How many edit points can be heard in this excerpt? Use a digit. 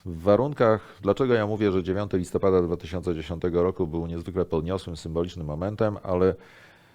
0